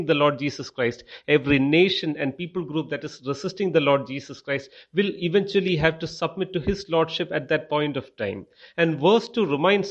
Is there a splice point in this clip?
no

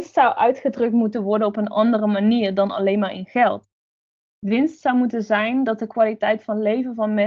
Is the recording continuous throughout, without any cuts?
yes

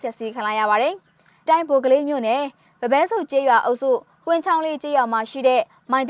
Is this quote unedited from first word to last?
no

